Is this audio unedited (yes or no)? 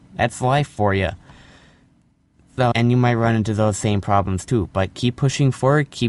no